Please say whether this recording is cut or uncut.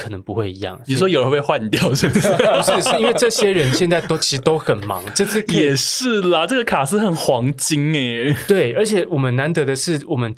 uncut